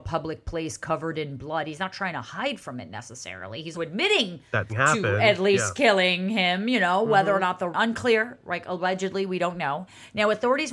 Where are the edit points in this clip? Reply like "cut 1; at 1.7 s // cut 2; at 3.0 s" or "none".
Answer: cut 1; at 3.7 s // cut 2; at 4.7 s // cut 3; at 7.7 s